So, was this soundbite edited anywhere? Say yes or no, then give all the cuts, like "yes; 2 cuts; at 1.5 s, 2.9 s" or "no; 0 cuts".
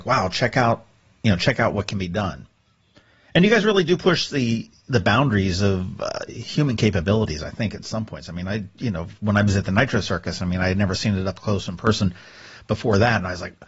no; 0 cuts